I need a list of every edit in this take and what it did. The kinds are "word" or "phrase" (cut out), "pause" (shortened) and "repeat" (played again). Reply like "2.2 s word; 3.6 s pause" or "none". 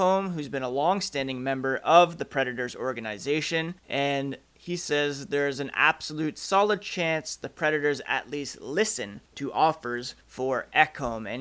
3.8 s pause; 9.3 s pause; 10.2 s pause